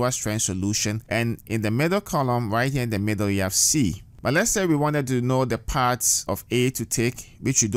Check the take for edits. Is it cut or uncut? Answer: cut